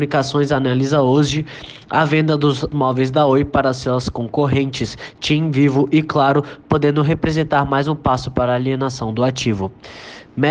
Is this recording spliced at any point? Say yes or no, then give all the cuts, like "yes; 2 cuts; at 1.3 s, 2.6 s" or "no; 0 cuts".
yes; 1 cut; at 2.7 s